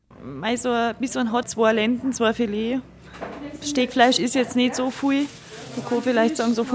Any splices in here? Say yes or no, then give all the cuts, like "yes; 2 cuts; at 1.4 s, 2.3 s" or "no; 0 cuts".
yes; 1 cut; at 1.4 s